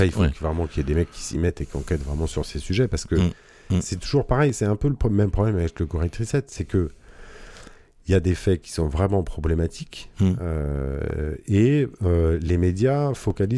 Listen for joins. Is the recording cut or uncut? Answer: uncut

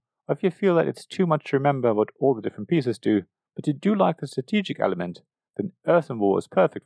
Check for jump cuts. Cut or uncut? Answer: uncut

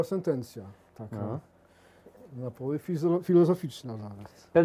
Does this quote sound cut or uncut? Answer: uncut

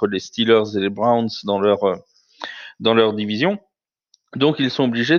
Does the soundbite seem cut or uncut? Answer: uncut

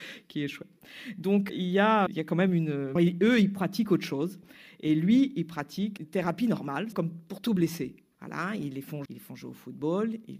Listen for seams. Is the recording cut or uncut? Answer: cut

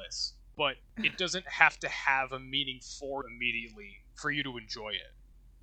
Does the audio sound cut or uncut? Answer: cut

